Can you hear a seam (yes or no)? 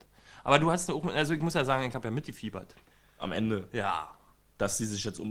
yes